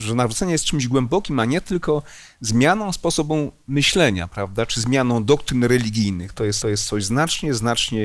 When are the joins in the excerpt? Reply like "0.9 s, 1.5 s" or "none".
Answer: 6.6 s